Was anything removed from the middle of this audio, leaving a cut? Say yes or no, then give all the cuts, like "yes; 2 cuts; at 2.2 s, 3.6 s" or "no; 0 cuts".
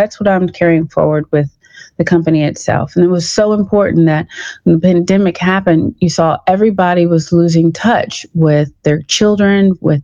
no; 0 cuts